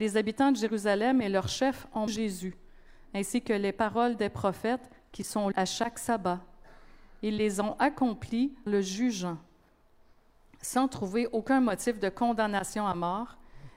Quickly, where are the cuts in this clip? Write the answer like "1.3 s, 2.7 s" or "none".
2.1 s, 5.5 s, 8.7 s